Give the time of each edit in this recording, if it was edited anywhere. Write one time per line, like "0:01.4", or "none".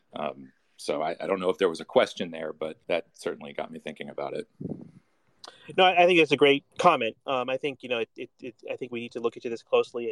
0:02.8
0:06.7

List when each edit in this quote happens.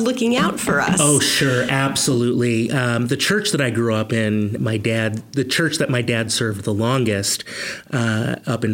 0:04.6

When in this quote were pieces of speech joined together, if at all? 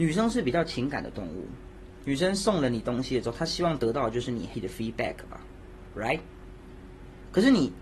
0:04.5

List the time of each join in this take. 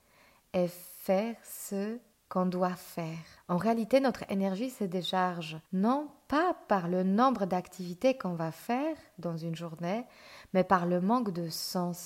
0:02.1
0:03.4
0:05.7

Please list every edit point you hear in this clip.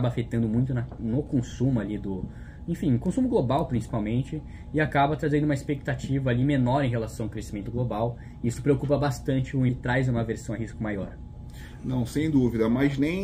0:09.7

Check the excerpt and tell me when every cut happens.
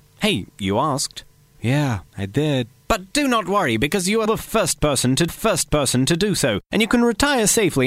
0:02.1
0:04.3
0:05.3
0:06.6

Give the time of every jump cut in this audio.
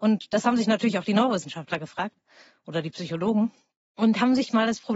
none

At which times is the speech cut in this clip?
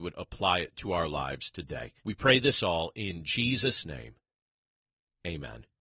0:02.0

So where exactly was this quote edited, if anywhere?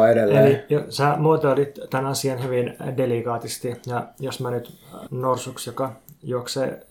0:05.1

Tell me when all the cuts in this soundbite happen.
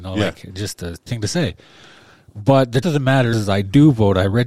0:01.1
0:02.8
0:03.3

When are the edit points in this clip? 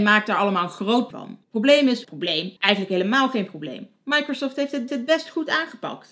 0:01.1
0:01.4
0:02.0
0:02.6
0:04.9

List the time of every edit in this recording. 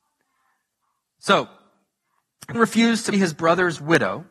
0:02.5
0:03.1

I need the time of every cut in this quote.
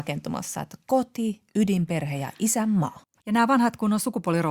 0:03.1

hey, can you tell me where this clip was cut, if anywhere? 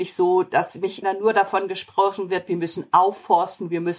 0:01.0

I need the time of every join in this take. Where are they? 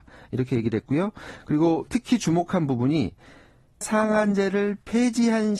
0:01.9
0:03.8

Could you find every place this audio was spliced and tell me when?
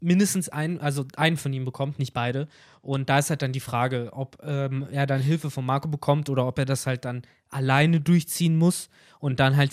none

